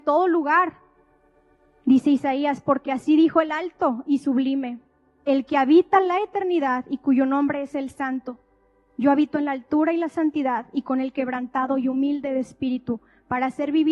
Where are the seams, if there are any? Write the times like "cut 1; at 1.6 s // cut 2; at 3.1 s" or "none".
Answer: none

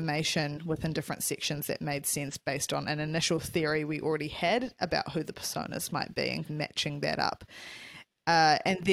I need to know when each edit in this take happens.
cut 1; at 6.4 s

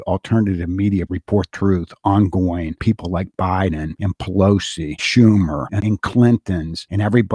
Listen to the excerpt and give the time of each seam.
cut 1; at 1.1 s // cut 2; at 1.5 s // cut 3; at 2.8 s // cut 4; at 5.0 s // cut 5; at 5.8 s

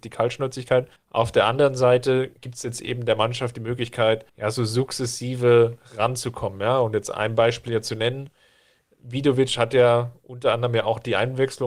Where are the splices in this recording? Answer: cut 1; at 1.0 s // cut 2; at 2.4 s // cut 3; at 4.3 s

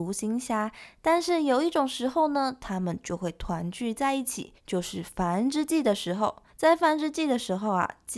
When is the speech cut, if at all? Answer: cut 1; at 4.6 s // cut 2; at 6.5 s

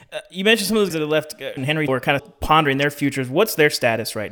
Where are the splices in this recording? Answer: cut 1; at 0.9 s // cut 2; at 1.6 s // cut 3; at 1.9 s // cut 4; at 2.2 s

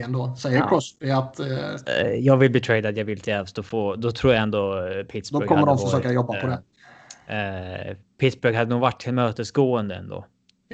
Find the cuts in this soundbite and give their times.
none

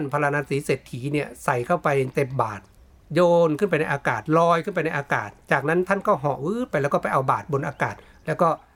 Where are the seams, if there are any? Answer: cut 1; at 2.7 s

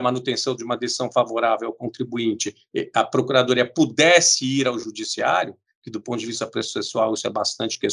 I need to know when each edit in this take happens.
none

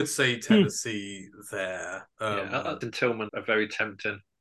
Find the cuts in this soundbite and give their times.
cut 1; at 2.1 s // cut 2; at 2.8 s // cut 3; at 3.3 s

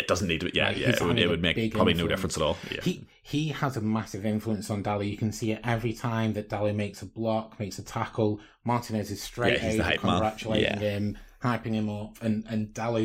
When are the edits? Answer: none

